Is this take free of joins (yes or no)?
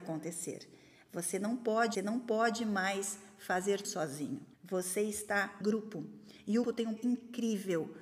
no